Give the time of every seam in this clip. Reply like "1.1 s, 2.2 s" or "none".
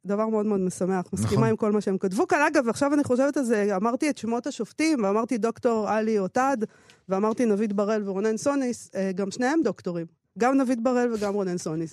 none